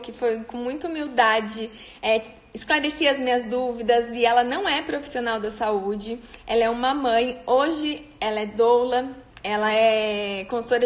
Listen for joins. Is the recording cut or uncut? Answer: cut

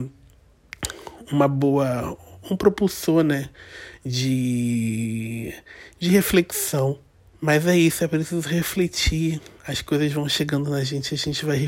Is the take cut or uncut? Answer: cut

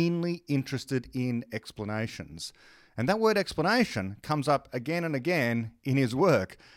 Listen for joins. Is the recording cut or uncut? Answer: uncut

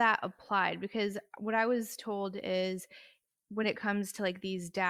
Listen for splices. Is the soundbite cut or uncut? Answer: uncut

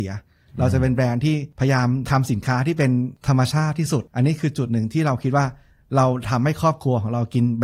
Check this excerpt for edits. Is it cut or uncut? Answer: uncut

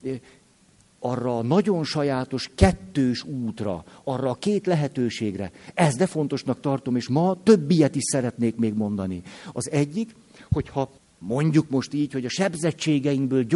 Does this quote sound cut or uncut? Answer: cut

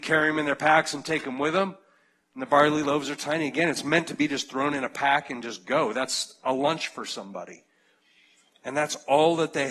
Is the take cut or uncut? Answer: uncut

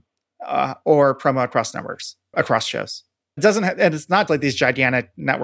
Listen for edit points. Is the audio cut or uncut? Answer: cut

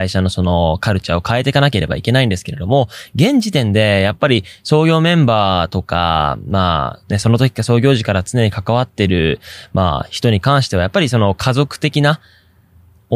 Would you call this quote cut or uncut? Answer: cut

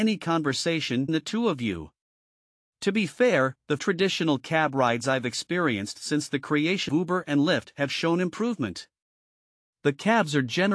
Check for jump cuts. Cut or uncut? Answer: cut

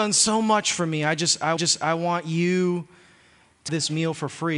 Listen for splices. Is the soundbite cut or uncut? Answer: cut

